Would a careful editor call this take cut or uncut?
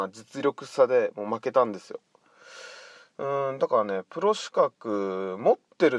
uncut